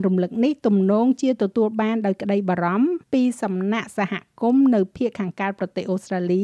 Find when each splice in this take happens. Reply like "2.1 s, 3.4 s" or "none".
3.0 s